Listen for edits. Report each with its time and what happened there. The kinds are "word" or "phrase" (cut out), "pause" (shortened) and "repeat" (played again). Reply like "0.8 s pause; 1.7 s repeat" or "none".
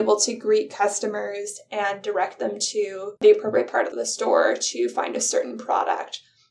3.2 s pause